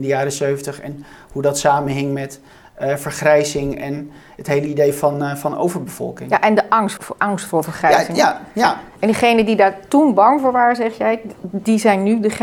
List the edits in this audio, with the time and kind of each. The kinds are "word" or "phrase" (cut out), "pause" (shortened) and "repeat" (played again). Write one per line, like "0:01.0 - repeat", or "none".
0:07.0 - word